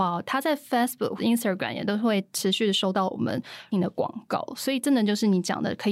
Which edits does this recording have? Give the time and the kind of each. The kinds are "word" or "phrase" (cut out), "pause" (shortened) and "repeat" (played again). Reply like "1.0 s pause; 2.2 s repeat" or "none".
1.2 s phrase; 3.7 s word